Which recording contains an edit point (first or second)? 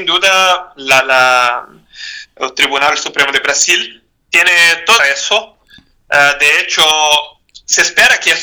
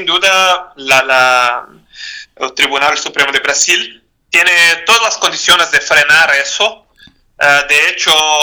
first